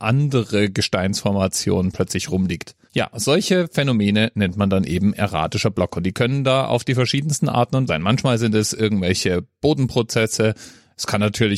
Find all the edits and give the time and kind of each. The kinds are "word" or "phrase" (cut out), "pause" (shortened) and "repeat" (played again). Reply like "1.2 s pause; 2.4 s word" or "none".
2.9 s pause; 7.9 s phrase